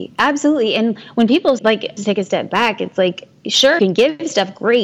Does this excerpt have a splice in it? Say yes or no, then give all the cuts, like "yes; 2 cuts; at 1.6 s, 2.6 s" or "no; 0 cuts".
yes; 3 cuts; at 1.6 s, 2.0 s, 3.8 s